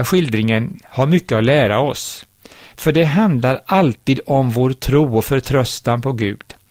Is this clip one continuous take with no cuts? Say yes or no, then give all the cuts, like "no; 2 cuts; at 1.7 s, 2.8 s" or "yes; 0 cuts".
yes; 0 cuts